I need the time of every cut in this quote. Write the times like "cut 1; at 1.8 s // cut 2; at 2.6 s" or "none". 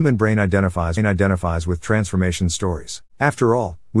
cut 1; at 1.0 s // cut 2; at 3.1 s